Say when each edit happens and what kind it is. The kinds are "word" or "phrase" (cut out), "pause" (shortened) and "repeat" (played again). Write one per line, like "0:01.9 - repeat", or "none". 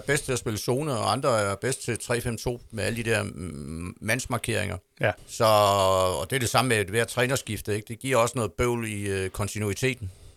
0:05.2 - pause